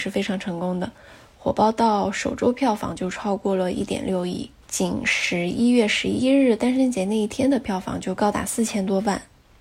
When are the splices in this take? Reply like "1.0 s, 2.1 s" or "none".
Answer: 4.6 s